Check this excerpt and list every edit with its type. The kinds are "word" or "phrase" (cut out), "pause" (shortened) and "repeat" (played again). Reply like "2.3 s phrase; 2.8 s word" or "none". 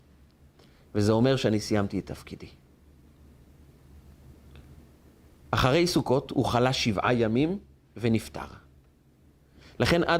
none